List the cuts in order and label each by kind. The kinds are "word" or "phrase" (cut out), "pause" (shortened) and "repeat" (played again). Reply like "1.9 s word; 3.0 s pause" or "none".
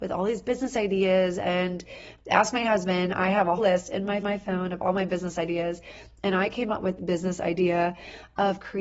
3.6 s word; 4.2 s repeat; 7.0 s word